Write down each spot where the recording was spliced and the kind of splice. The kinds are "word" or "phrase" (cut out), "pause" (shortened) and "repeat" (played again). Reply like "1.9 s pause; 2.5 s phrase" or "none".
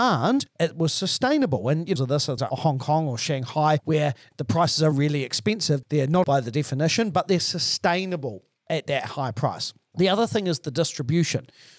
2.0 s phrase; 2.4 s word; 4.9 s word; 6.2 s word